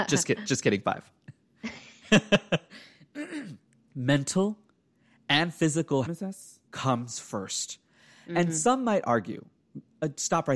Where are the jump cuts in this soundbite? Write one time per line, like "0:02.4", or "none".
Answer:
0:03.6
0:06.0
0:06.7